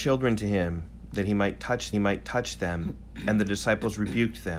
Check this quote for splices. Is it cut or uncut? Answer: cut